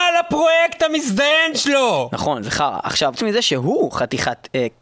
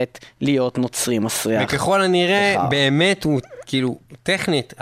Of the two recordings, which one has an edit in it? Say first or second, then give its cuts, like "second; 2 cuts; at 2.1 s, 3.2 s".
first; 1 cut; at 3.2 s